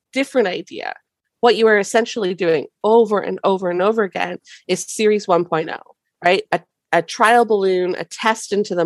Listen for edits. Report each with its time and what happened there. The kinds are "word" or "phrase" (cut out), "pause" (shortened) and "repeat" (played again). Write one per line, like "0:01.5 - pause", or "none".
none